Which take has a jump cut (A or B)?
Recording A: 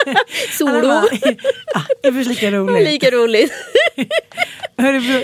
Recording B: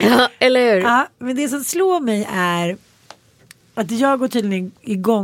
A